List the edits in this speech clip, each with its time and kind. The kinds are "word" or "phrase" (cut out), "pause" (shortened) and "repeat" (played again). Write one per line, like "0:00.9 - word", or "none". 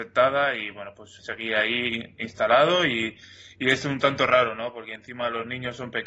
0:01.2 - word